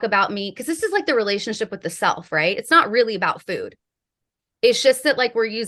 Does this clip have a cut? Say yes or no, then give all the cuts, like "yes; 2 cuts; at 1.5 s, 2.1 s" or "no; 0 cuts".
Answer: no; 0 cuts